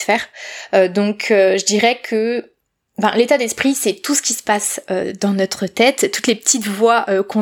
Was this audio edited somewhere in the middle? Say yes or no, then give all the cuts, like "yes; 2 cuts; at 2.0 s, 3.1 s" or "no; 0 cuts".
no; 0 cuts